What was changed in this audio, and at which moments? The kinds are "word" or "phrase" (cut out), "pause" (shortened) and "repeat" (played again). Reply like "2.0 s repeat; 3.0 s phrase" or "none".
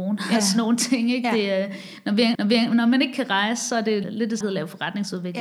2.3 s repeat; 4.0 s phrase; 4.4 s phrase